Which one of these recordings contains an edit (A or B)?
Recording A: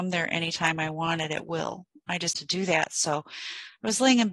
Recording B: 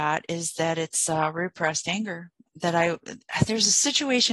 A